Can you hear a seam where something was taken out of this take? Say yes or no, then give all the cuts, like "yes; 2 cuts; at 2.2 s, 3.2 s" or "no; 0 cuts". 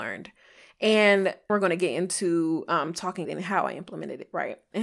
yes; 2 cuts; at 1.5 s, 3.2 s